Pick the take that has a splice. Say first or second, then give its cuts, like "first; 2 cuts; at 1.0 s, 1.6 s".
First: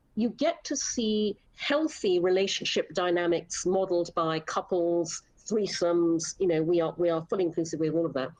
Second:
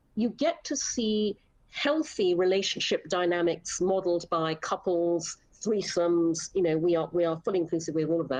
first; 1 cut; at 1.5 s